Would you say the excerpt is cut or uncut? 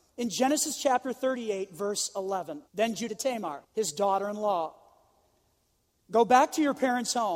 cut